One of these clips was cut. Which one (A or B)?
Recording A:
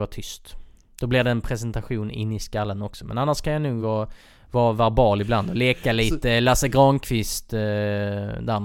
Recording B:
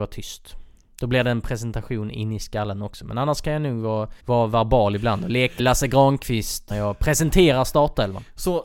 B